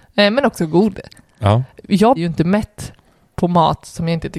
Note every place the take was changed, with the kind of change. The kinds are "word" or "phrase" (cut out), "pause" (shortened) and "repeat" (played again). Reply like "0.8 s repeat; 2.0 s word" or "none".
2.2 s word

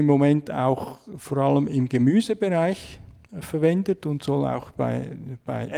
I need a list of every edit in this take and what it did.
none

